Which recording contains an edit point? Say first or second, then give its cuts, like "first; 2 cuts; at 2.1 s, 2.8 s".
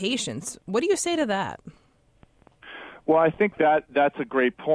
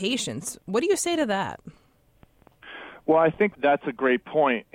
second; 1 cut; at 3.5 s